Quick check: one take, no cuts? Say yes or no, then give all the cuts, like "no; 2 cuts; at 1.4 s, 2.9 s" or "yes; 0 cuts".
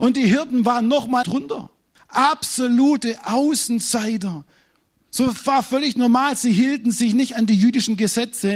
no; 3 cuts; at 1.2 s, 1.9 s, 4.9 s